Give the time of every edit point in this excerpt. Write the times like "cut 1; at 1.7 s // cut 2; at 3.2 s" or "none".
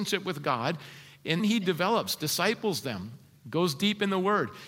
cut 1; at 1.4 s

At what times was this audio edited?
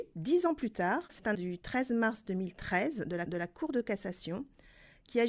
cut 1; at 1.3 s // cut 2; at 3.3 s

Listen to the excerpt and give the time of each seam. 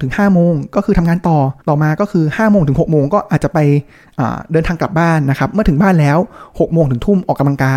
cut 1; at 1.6 s

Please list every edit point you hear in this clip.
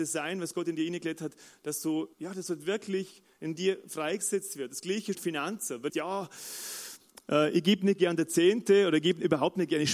cut 1; at 2.1 s // cut 2; at 5.1 s // cut 3; at 5.9 s

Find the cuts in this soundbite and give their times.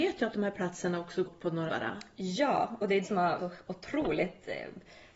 cut 1; at 1.3 s // cut 2; at 1.7 s // cut 3; at 3.0 s // cut 4; at 3.4 s

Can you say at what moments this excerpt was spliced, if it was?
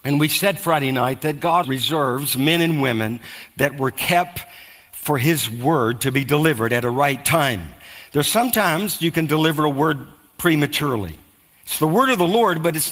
cut 1; at 1.6 s

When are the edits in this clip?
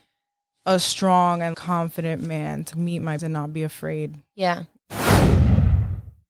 cut 1; at 1.5 s // cut 2; at 2.7 s // cut 3; at 3.2 s

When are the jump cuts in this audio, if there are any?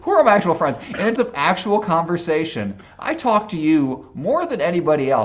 cut 1; at 1.2 s

